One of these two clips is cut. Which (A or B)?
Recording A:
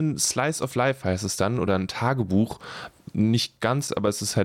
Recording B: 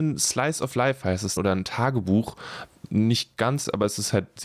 B